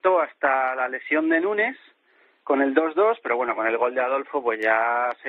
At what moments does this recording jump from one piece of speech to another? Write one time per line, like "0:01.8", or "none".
none

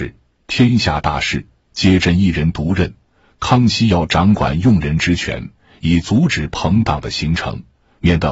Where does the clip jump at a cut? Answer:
none

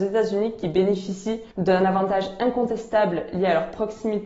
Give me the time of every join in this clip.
0:01.5

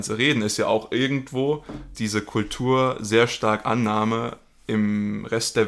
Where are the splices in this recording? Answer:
0:01.9

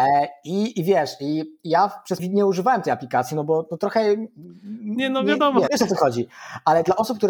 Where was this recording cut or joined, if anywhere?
0:02.2
0:05.7

